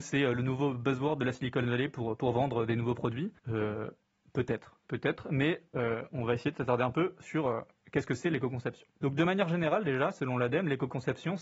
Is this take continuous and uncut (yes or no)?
no